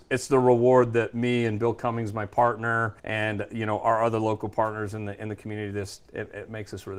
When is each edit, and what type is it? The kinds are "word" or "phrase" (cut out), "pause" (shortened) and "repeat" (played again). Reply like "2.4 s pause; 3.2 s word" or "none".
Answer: 3.0 s pause